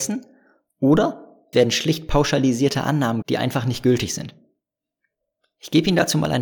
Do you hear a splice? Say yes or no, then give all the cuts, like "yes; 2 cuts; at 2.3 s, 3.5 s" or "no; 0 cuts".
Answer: yes; 2 cuts; at 1.5 s, 3.2 s